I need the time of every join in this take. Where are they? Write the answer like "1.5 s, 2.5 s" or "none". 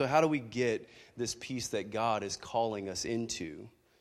none